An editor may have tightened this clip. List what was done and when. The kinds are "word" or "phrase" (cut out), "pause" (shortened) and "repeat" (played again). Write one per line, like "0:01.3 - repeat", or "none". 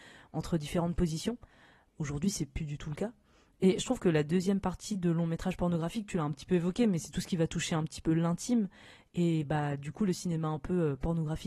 none